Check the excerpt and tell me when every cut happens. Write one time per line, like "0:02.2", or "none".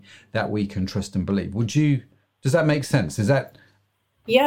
none

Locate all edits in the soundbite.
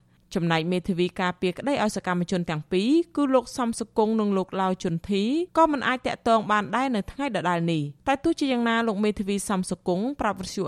0:05.5
0:08.0

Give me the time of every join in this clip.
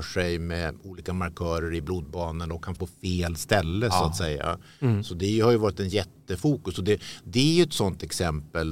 0:02.8

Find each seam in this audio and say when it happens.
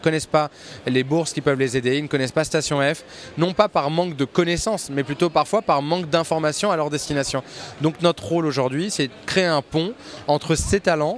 none

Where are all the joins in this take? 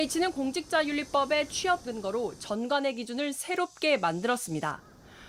0:01.8

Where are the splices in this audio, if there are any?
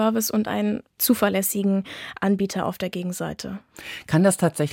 0:01.0

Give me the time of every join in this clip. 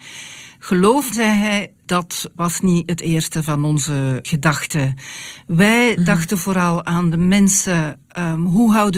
0:01.1

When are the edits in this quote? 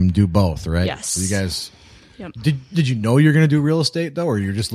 none

